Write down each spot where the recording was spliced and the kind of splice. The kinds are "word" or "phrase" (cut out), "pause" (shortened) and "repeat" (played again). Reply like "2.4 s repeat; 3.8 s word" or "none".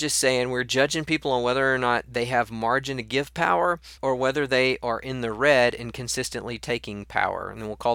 4.0 s pause